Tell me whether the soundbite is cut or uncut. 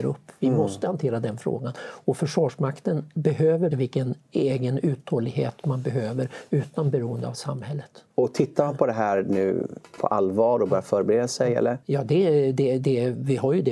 cut